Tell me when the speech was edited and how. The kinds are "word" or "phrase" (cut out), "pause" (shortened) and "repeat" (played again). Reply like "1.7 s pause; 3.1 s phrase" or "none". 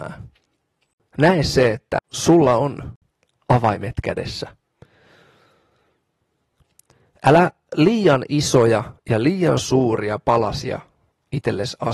9.0 s pause